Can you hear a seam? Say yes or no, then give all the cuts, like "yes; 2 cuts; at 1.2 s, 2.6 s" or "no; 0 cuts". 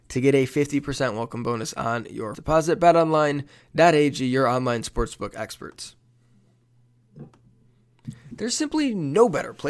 yes; 1 cut; at 2.3 s